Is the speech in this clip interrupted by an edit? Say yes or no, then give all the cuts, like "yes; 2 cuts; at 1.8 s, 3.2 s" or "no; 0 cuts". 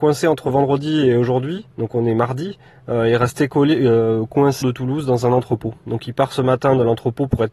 yes; 2 cuts; at 1.7 s, 4.6 s